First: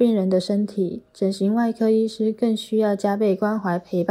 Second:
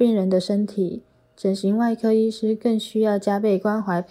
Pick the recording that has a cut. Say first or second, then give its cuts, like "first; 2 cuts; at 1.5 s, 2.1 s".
first; 1 cut; at 1.1 s